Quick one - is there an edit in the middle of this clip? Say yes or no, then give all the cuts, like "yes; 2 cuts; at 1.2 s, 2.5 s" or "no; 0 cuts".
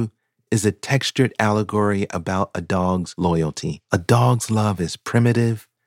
yes; 1 cut; at 3.8 s